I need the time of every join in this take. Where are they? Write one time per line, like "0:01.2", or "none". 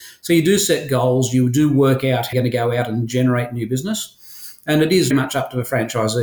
0:02.3
0:05.1